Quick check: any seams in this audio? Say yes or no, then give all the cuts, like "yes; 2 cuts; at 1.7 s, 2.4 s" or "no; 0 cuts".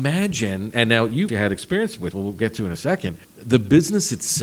yes; 3 cuts; at 1.3 s, 2.1 s, 3.2 s